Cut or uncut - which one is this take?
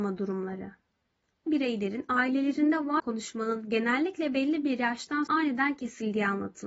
cut